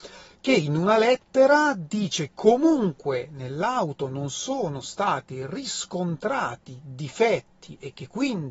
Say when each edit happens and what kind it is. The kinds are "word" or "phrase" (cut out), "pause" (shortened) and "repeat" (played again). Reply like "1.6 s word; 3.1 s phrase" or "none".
2.3 s word